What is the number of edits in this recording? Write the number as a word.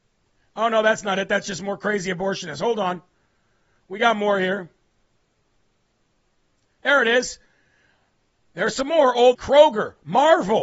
one